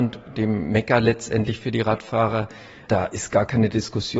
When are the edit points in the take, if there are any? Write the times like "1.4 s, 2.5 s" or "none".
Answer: none